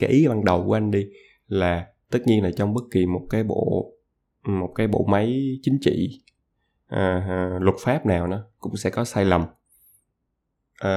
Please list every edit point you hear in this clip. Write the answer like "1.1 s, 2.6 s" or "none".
none